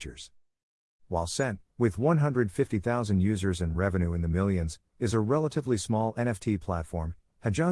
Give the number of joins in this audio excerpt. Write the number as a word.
zero